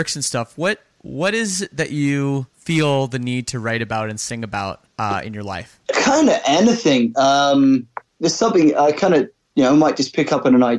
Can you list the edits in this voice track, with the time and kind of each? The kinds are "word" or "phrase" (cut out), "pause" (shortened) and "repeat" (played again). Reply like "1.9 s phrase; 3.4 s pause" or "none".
2.5 s pause; 4.9 s pause; 5.8 s pause; 8.1 s pause